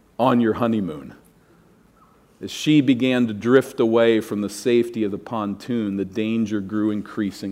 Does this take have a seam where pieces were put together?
no; 0 cuts

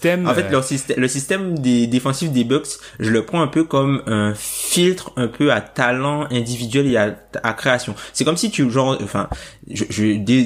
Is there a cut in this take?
no; 0 cuts

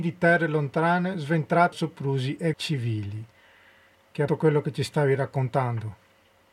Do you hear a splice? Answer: yes; 3 cuts; at 1.7 s, 2.5 s, 4.3 s

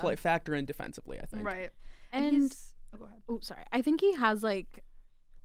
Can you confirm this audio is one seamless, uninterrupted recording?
yes; 0 cuts

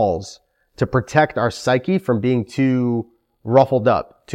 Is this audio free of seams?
yes; 0 cuts

